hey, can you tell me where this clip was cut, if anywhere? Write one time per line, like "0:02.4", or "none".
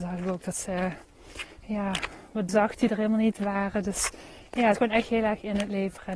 0:02.5
0:04.7